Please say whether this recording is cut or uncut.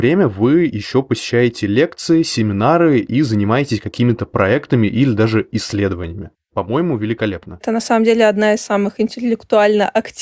uncut